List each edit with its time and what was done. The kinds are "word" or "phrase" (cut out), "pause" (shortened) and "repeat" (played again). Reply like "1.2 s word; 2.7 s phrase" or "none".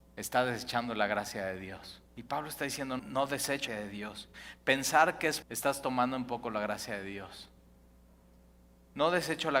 2.1 s pause; 3.0 s word; 3.7 s phrase; 5.4 s phrase